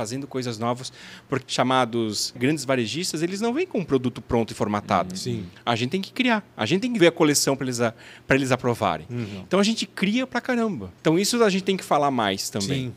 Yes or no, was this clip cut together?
yes